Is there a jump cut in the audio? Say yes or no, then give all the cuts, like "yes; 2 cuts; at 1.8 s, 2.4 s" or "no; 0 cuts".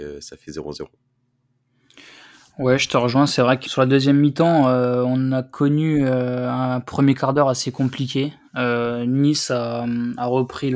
yes; 1 cut; at 3.7 s